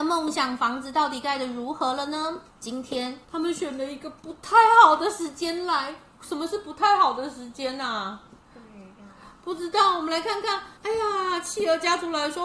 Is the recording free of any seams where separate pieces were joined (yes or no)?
no